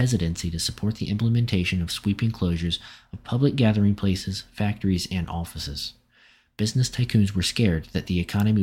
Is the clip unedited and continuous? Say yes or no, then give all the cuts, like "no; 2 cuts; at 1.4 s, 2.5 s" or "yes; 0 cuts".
yes; 0 cuts